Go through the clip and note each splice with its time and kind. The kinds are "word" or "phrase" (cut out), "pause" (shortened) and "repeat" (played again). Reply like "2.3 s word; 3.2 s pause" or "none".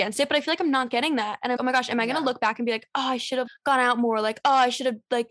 1.6 s word; 3.5 s word